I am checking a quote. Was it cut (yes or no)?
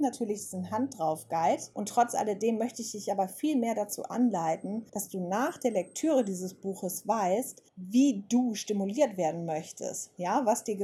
yes